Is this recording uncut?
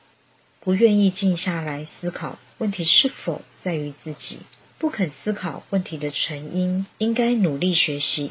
no; 2 cuts; at 4.6 s, 6.9 s

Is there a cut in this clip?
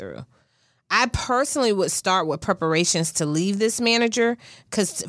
no; 0 cuts

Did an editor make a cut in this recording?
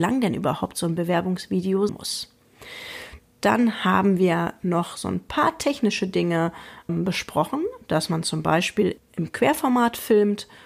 yes; 3 cuts; at 1.9 s, 6.9 s, 9.0 s

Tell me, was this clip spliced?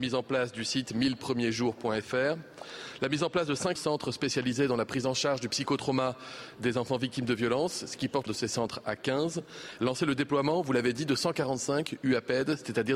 yes; 2 cuts; at 3.8 s, 8.3 s

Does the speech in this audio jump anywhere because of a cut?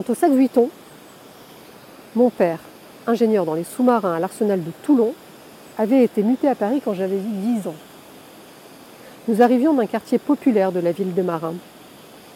no; 0 cuts

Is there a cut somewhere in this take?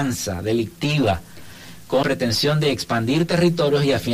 yes; 1 cut; at 2.0 s

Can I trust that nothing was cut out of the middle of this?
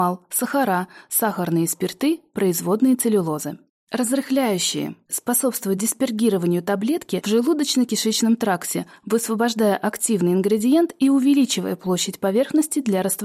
yes; 0 cuts

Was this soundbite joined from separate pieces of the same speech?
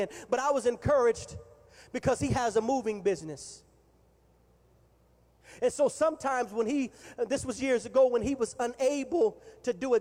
no; 0 cuts

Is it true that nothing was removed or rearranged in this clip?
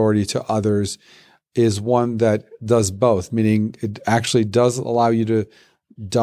yes; 0 cuts

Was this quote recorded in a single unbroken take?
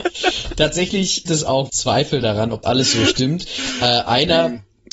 no; 3 cuts; at 1.3 s, 1.7 s, 2.6 s

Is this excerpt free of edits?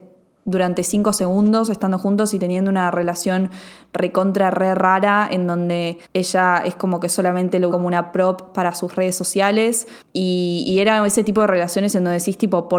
no; 3 cuts; at 6.0 s, 7.7 s, 10.0 s

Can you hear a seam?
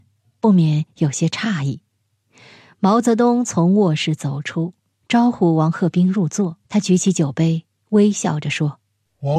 yes; 1 cut; at 6.6 s

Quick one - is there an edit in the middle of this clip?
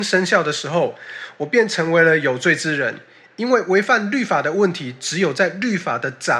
no; 0 cuts

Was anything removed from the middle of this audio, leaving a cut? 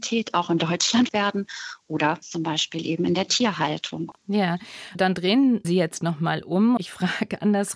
yes; 5 cuts; at 1.1 s, 2.2 s, 4.9 s, 5.6 s, 6.8 s

